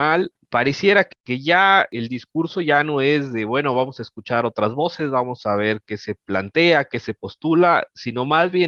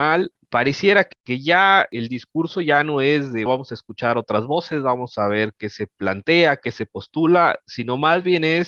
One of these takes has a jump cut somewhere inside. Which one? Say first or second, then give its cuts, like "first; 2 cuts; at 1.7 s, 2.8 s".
second; 1 cut; at 3.5 s